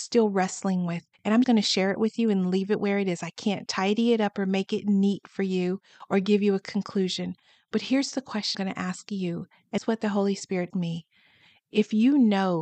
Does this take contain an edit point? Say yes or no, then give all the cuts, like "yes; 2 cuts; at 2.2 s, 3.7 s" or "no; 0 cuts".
yes; 4 cuts; at 1.4 s, 8.5 s, 9.8 s, 10.7 s